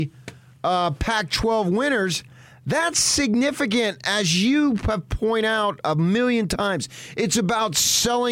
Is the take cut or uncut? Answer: uncut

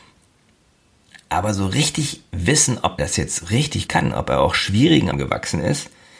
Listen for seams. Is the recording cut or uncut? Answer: cut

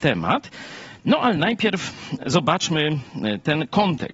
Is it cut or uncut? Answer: uncut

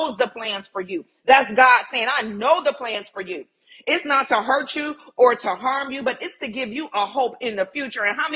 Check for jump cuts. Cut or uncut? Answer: uncut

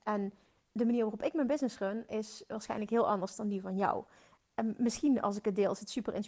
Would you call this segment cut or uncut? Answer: uncut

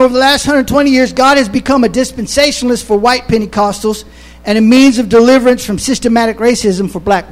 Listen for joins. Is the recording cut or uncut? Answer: uncut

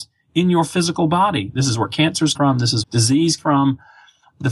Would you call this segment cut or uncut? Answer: cut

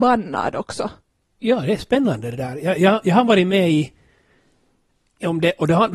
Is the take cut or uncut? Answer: uncut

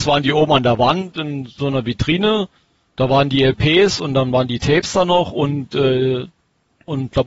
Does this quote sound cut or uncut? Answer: uncut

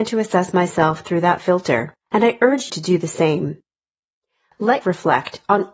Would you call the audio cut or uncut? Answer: cut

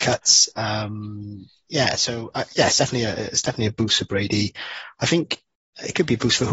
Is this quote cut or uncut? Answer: uncut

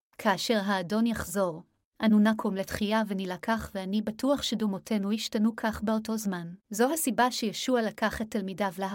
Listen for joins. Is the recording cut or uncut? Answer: cut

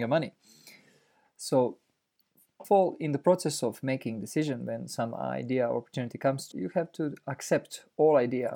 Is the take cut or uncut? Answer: cut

